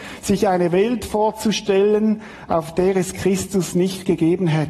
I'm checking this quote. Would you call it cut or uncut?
uncut